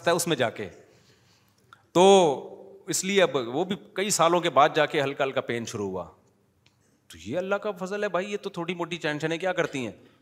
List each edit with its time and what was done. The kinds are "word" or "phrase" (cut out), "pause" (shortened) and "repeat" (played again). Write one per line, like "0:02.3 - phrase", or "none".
none